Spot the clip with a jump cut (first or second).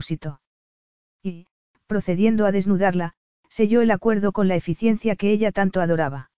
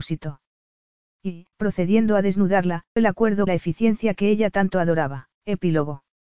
second